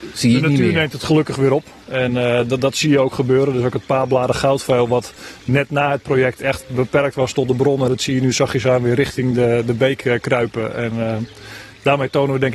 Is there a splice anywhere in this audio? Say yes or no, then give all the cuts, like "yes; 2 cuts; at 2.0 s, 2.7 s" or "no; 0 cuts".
no; 0 cuts